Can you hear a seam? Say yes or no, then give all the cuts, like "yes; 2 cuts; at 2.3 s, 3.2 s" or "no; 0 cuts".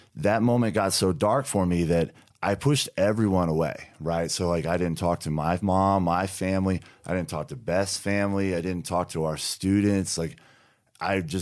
no; 0 cuts